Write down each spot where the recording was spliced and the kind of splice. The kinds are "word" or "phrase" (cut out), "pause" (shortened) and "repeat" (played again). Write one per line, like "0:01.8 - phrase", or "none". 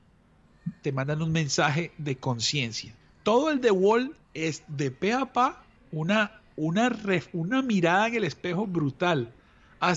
0:03.0 - pause
0:04.2 - pause
0:05.8 - pause